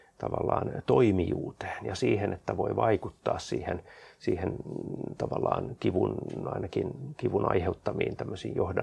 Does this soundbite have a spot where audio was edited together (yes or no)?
no